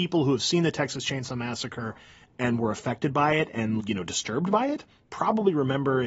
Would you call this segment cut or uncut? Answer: cut